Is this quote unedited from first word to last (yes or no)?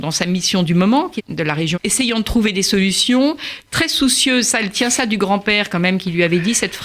no